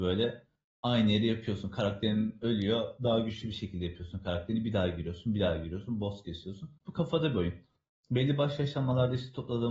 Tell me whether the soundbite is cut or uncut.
cut